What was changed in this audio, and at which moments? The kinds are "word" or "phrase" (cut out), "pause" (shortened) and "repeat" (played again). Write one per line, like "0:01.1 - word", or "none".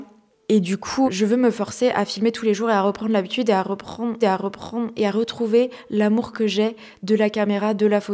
0:01.0 - word
0:04.2 - repeat